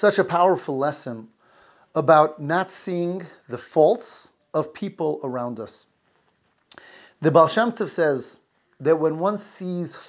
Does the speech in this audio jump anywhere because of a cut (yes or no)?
no